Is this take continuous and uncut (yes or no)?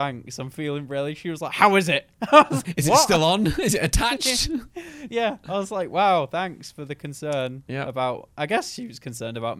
no